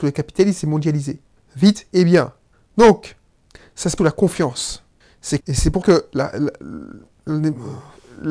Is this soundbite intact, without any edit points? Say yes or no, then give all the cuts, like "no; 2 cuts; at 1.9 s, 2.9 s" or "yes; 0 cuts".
no; 3 cuts; at 4.0 s, 5.4 s, 5.8 s